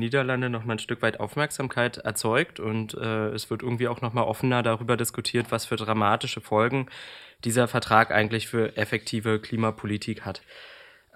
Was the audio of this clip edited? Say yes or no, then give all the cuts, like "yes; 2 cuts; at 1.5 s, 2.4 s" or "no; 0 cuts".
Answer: no; 0 cuts